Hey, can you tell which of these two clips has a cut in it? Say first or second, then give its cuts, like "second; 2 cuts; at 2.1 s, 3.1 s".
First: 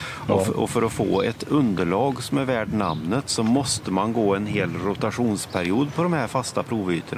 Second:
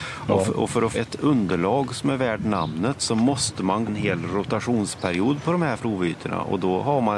second; 3 cuts; at 0.9 s, 3.9 s, 5.8 s